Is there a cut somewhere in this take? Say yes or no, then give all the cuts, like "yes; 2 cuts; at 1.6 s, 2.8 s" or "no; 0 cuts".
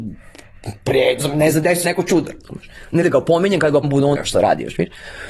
yes; 5 cuts; at 1.2 s, 1.8 s, 3.0 s, 3.8 s, 4.1 s